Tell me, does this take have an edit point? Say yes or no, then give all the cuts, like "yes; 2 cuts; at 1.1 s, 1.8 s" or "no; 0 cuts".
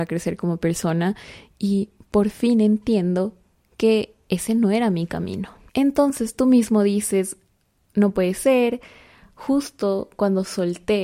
no; 0 cuts